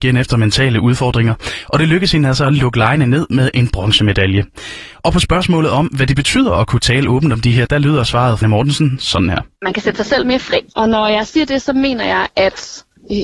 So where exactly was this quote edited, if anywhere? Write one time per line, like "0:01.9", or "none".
0:07.7
0:08.4
0:10.7